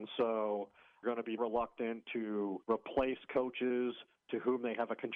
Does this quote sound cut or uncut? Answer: cut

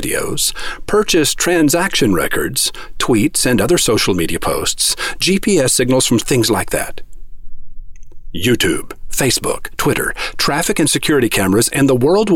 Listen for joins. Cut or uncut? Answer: cut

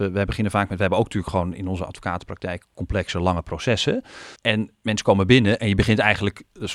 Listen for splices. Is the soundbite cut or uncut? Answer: cut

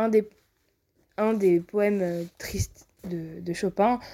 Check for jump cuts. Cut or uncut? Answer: cut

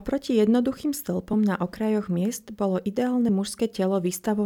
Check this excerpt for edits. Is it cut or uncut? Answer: uncut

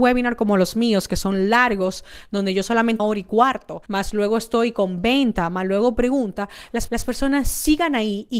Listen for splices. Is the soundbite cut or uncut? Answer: cut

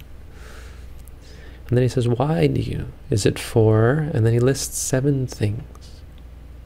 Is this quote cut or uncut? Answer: uncut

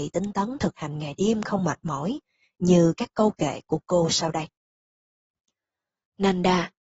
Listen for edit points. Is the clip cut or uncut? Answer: uncut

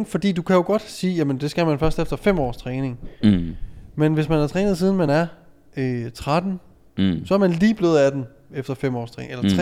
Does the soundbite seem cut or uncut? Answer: uncut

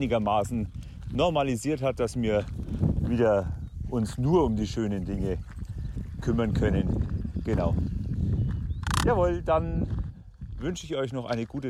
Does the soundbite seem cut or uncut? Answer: uncut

